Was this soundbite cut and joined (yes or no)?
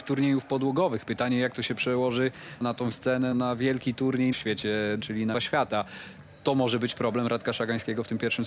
yes